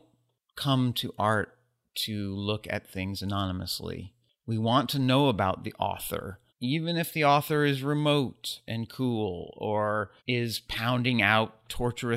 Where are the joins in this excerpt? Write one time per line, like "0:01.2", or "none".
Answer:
0:06.5
0:10.2